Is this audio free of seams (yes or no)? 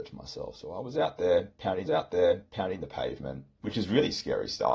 no